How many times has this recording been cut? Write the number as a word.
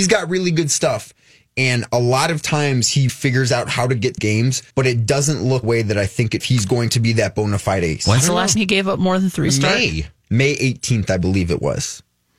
eight